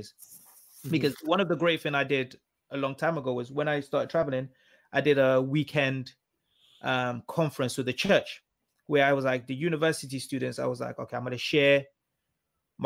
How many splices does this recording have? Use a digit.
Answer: 0